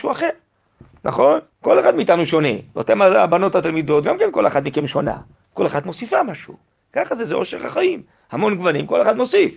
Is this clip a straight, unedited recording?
no; 1 cut; at 1.5 s

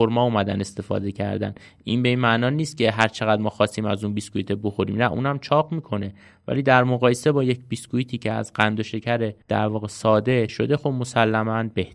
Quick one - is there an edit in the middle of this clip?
yes; 2 cuts; at 9.4 s, 10.5 s

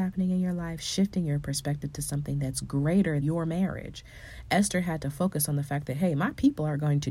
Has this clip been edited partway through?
yes; 1 cut; at 3.2 s

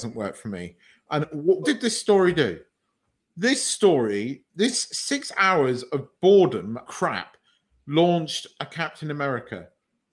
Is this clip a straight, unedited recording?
no; 4 cuts; at 1.2 s, 1.6 s, 4.5 s, 6.9 s

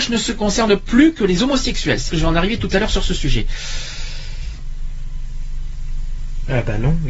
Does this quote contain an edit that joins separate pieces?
yes; 1 cut; at 2.1 s

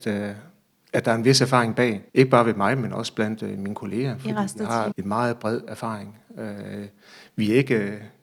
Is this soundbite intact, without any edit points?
no; 2 cuts; at 2.1 s, 4.9 s

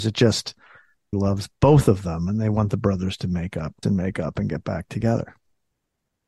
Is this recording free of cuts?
no; 2 cuts; at 1.1 s, 3.8 s

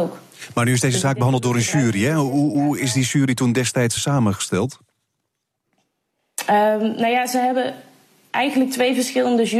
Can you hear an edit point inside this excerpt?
yes; 1 cut; at 4.0 s

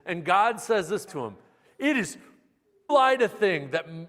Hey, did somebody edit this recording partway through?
yes; 2 cuts; at 1.1 s, 2.9 s

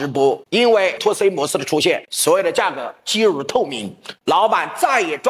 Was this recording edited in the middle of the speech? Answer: yes; 1 cut; at 1.0 s

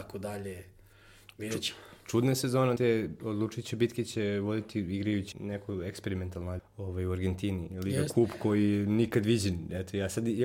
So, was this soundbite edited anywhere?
yes; 3 cuts; at 2.8 s, 5.3 s, 6.6 s

